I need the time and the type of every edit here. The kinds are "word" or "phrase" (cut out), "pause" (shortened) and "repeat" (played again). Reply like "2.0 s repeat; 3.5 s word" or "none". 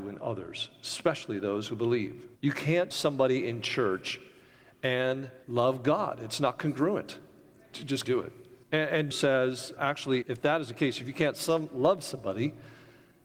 2.3 s pause; 2.9 s word; 5.4 s pause; 8.0 s word; 8.6 s pause; 9.1 s word; 9.8 s word; 10.2 s word